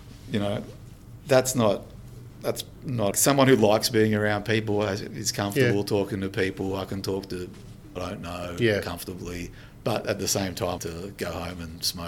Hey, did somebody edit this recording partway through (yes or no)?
yes